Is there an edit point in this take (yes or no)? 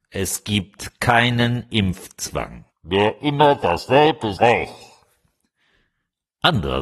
yes